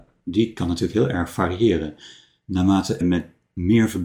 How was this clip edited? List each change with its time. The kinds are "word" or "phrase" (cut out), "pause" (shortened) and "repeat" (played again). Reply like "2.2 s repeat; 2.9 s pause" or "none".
3.0 s word